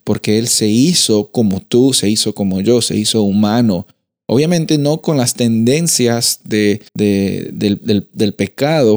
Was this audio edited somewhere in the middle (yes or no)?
yes